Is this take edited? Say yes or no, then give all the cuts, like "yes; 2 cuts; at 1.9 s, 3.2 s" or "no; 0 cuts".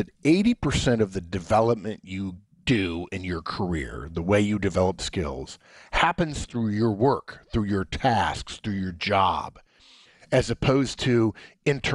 no; 0 cuts